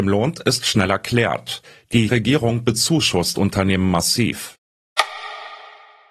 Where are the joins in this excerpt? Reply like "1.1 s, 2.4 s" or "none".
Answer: 2.1 s, 3.4 s